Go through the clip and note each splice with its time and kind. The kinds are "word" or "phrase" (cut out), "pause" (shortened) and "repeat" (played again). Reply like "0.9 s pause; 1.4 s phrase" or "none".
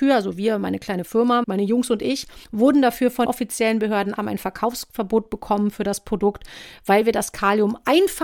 1.4 s word; 2.4 s pause; 3.2 s word; 4.2 s word